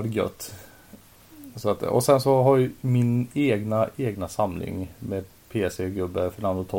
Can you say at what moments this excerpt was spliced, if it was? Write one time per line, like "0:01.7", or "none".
none